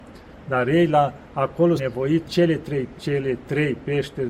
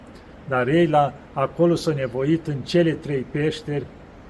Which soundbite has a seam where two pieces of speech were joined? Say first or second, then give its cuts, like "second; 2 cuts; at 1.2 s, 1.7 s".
first; 3 cuts; at 1.8 s, 2.2 s, 2.9 s